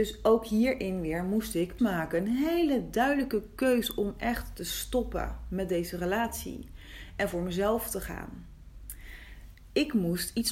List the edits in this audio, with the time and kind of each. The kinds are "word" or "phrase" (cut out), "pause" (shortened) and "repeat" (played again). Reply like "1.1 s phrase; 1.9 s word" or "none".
1.8 s phrase